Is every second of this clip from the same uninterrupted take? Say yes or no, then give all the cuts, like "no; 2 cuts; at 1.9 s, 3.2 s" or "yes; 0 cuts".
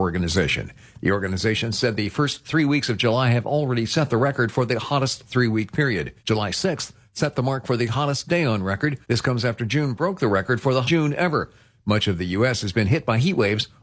no; 3 cuts; at 6.2 s, 9.0 s, 10.8 s